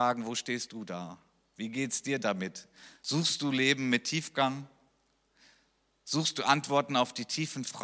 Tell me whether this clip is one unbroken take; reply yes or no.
yes